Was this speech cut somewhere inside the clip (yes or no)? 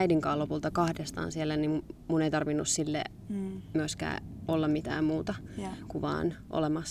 no